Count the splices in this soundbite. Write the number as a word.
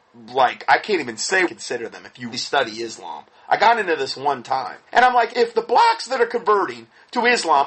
four